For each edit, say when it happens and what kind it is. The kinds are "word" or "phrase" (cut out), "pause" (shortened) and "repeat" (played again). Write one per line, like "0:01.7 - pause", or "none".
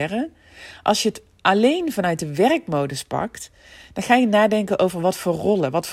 none